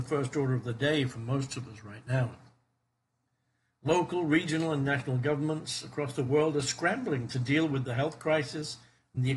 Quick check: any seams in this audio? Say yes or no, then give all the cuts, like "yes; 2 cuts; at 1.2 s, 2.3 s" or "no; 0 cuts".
no; 0 cuts